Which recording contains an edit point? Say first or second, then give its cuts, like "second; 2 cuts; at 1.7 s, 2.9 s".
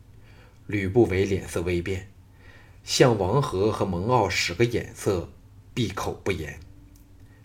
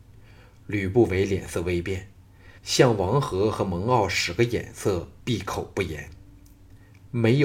second; 2 cuts; at 2.6 s, 5.2 s